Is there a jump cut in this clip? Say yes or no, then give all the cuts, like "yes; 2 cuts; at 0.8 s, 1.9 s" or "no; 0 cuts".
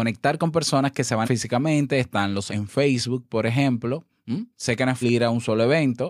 yes; 4 cuts; at 1.2 s, 2.5 s, 4.5 s, 5.0 s